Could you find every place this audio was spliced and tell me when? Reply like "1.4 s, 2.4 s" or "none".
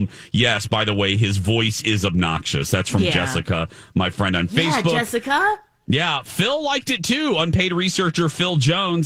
none

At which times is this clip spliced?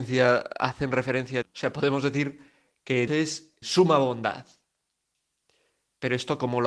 1.4 s, 3.1 s, 3.6 s

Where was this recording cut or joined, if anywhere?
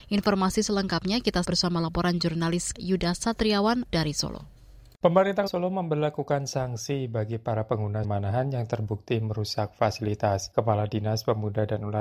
1.4 s, 2.7 s, 3.9 s, 5.5 s, 8.0 s

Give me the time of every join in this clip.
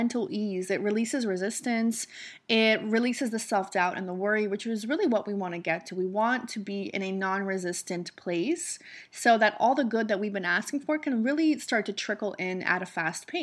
none

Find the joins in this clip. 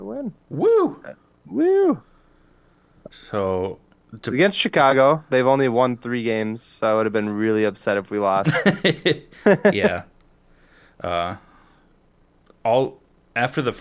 none

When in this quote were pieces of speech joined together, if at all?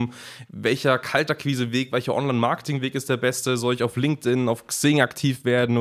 none

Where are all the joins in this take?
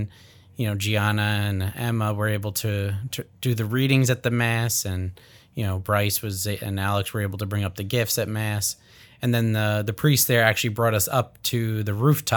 none

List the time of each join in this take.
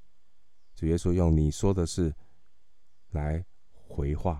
none

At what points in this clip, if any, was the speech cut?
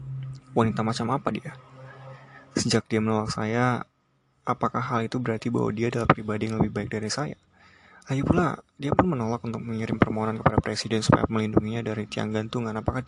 none

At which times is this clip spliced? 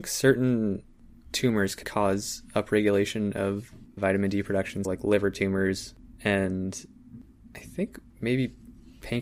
1.8 s, 4.0 s, 4.8 s

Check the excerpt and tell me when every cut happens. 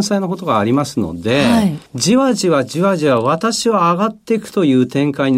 1.9 s

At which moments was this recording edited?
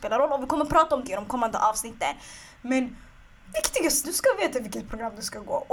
1.0 s, 3.5 s, 4.0 s

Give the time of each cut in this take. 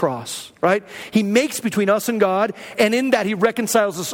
1.6 s, 2.8 s

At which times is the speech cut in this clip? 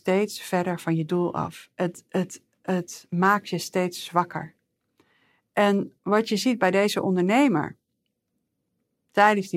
6.0 s

